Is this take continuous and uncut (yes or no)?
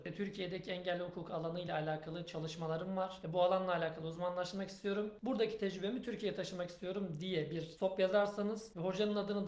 yes